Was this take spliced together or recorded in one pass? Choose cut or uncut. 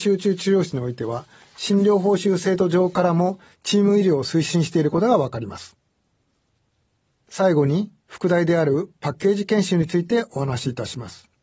uncut